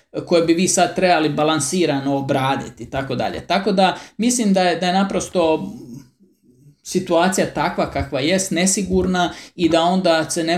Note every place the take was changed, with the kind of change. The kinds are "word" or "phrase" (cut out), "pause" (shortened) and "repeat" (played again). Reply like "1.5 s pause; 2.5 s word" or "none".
none